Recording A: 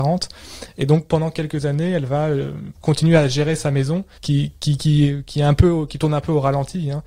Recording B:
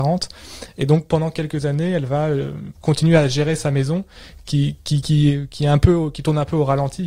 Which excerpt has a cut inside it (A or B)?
A